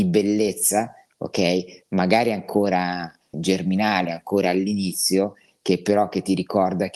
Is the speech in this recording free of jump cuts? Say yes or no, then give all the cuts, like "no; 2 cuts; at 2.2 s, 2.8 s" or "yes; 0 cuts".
no; 1 cut; at 3.3 s